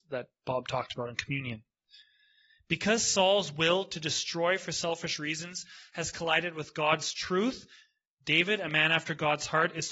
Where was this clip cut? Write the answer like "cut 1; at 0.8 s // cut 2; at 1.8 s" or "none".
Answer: none